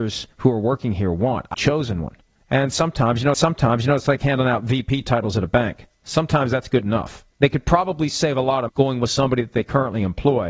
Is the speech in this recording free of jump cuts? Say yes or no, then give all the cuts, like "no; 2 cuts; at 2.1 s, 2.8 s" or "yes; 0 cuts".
no; 5 cuts; at 1.5 s, 2.4 s, 3.3 s, 7.3 s, 8.7 s